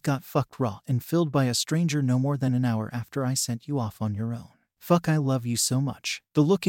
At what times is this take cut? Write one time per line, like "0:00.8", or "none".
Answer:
none